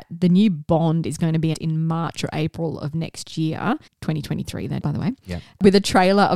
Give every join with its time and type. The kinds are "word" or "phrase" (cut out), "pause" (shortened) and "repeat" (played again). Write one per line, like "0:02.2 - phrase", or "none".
0:01.5 - word
0:03.9 - pause
0:04.8 - word